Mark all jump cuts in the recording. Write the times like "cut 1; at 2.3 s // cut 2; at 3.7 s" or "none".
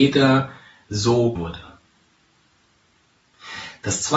cut 1; at 1.4 s